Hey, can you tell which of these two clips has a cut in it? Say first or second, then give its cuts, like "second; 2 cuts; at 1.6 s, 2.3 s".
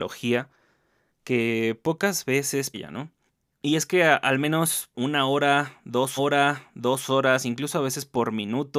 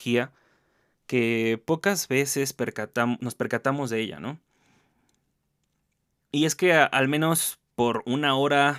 first; 4 cuts; at 2.7 s, 3.3 s, 4.9 s, 6.2 s